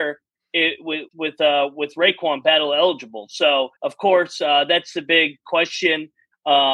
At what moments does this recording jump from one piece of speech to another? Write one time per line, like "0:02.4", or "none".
0:01.1
0:03.8